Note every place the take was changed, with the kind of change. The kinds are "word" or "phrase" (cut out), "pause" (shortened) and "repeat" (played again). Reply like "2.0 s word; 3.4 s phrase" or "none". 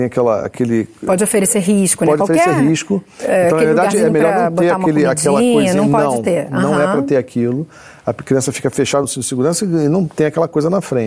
none